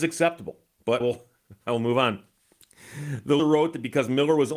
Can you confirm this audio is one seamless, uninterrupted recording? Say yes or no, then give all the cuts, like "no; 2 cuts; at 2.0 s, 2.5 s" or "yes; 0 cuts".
no; 3 cuts; at 1.0 s, 1.6 s, 3.4 s